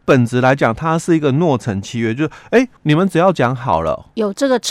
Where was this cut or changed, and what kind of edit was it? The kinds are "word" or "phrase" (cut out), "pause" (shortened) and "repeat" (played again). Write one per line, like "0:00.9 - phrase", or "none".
0:02.8 - pause